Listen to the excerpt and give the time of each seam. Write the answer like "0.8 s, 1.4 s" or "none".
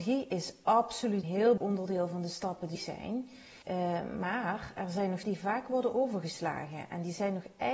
1.2 s, 1.6 s, 2.8 s, 3.6 s, 5.2 s